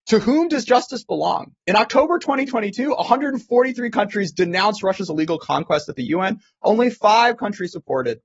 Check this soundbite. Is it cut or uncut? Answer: uncut